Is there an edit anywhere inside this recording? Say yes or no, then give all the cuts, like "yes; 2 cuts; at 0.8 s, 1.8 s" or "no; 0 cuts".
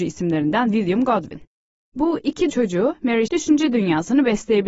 yes; 2 cuts; at 2.5 s, 3.3 s